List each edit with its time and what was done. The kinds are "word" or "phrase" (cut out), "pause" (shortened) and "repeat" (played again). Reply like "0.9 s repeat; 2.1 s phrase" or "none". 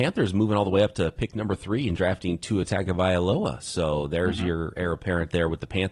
none